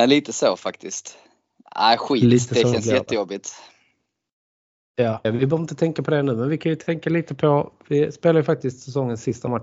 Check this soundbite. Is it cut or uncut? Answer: cut